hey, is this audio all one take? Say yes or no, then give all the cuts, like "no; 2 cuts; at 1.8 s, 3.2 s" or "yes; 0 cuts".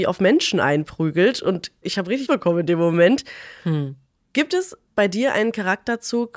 no; 3 cuts; at 1.8 s, 2.3 s, 4.9 s